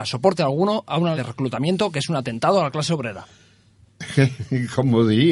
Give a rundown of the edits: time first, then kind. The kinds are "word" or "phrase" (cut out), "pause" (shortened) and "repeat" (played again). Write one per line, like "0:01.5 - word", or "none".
0:01.1 - word